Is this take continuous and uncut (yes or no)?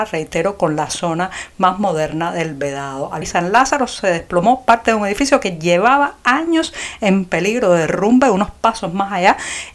no